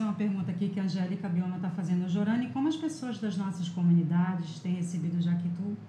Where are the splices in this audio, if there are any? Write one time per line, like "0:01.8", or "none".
none